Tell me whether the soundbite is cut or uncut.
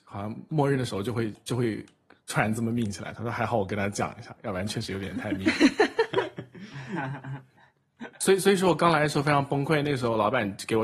uncut